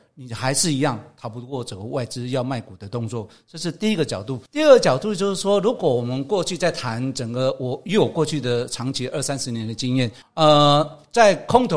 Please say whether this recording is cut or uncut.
cut